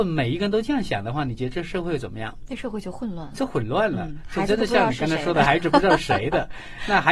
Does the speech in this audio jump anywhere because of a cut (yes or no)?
no